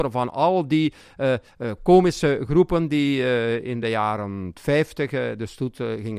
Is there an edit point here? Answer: no; 0 cuts

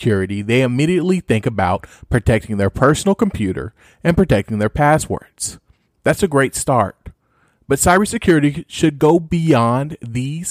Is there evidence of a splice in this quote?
no; 0 cuts

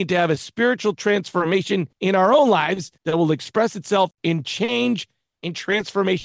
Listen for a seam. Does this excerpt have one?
yes; 2 cuts; at 1.9 s, 3.0 s

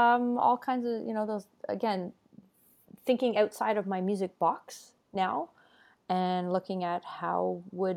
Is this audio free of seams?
yes; 0 cuts

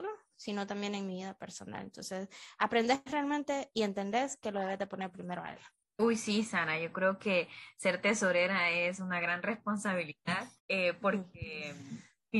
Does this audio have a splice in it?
yes; 1 cut; at 10.6 s

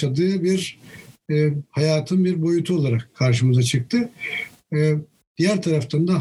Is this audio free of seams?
yes; 0 cuts

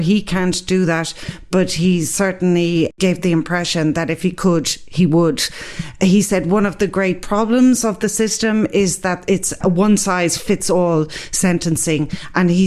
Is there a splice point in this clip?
no; 0 cuts

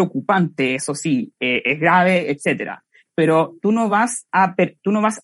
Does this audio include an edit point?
no; 0 cuts

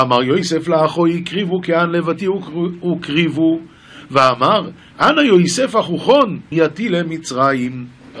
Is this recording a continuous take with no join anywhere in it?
no; 1 cut; at 6.5 s

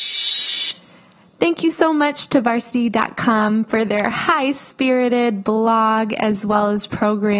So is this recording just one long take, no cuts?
yes; 0 cuts

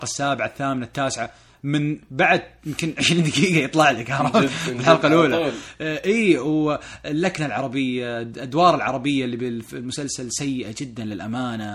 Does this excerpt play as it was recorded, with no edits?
yes; 0 cuts

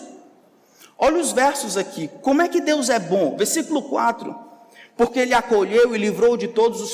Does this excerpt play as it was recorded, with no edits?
yes; 0 cuts

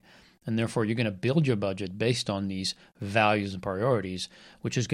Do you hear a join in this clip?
no; 0 cuts

